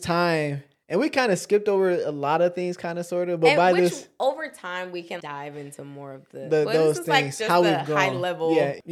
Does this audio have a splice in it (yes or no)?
yes